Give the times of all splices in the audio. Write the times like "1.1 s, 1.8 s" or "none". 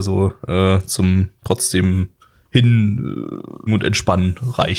3.7 s